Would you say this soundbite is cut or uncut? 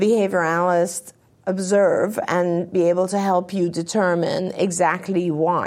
uncut